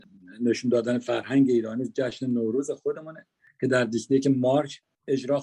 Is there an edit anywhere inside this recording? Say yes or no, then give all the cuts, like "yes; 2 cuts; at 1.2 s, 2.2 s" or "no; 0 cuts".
no; 0 cuts